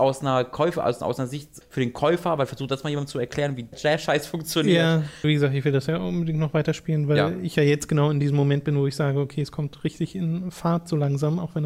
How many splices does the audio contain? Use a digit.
3